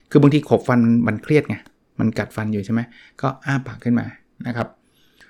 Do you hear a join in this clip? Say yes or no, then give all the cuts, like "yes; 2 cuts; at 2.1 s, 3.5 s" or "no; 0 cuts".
no; 0 cuts